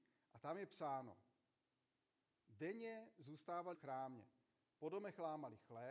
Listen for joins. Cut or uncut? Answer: cut